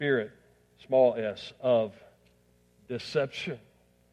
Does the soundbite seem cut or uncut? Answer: uncut